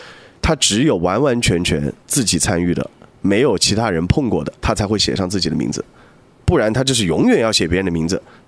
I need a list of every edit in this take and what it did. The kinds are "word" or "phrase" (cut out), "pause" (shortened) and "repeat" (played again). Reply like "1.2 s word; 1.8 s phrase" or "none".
4.6 s pause